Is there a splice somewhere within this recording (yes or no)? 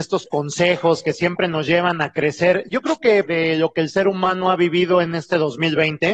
yes